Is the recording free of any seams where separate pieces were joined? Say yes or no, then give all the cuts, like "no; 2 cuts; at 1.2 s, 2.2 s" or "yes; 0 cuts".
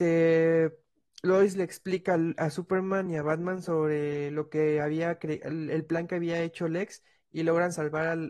yes; 0 cuts